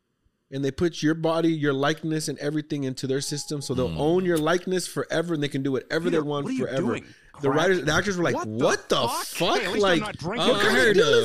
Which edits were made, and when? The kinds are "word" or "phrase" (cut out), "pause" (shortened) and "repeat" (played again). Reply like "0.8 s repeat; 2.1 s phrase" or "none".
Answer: none